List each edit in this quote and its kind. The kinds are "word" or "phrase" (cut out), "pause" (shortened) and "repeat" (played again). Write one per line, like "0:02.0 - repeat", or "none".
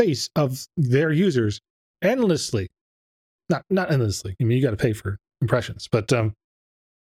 none